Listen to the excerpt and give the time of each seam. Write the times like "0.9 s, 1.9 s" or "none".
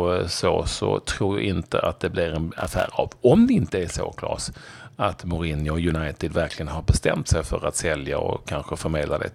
none